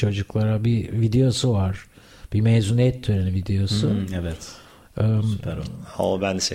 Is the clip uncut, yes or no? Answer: yes